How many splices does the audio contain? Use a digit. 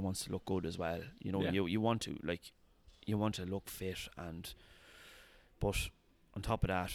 0